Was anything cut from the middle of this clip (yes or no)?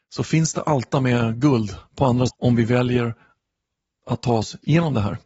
yes